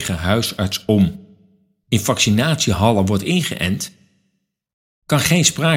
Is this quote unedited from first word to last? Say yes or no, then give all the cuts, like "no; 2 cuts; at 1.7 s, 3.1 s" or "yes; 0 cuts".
yes; 0 cuts